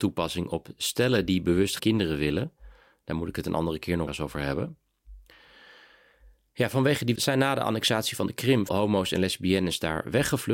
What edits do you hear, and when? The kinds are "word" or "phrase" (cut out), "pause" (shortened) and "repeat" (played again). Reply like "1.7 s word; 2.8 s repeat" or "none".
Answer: 1.8 s word; 4.1 s word; 7.2 s word; 8.7 s word